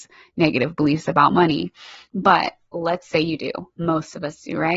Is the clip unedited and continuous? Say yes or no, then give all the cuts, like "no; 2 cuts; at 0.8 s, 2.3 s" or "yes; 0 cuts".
yes; 0 cuts